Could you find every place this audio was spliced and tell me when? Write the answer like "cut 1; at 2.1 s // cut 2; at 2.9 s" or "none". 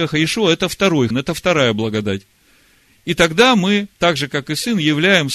cut 1; at 1.1 s // cut 2; at 3.9 s